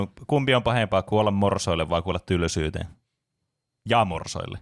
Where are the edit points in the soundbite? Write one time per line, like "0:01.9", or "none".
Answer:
none